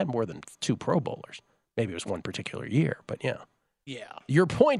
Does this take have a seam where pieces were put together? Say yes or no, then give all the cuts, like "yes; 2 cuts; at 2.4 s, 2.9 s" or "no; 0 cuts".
no; 0 cuts